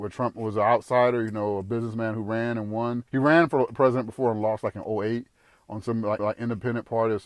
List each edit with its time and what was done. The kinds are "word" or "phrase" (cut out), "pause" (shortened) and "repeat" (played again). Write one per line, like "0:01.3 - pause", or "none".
0:03.1 - pause
0:06.2 - repeat

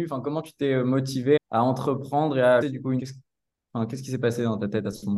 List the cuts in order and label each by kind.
0:01.4 - word
0:02.6 - word
0:03.0 - word

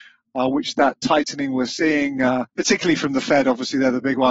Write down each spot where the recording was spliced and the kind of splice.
0:02.5 - pause

